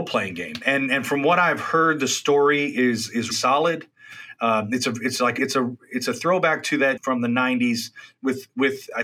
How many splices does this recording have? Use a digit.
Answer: 3